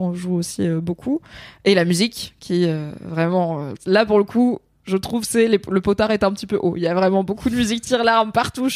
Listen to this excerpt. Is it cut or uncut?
uncut